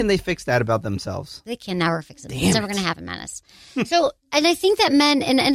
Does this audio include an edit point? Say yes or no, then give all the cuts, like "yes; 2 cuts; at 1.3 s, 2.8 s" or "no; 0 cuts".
no; 0 cuts